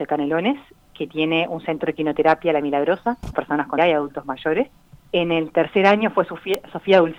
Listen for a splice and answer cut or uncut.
cut